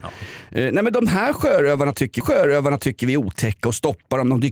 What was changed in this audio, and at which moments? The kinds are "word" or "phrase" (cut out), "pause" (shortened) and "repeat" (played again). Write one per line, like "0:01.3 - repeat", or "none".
0:02.2 - repeat